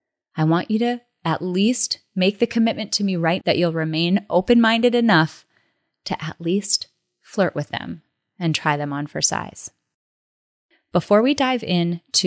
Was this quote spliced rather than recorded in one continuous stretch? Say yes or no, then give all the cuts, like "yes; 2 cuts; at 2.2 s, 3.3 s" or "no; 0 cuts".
yes; 1 cut; at 3.4 s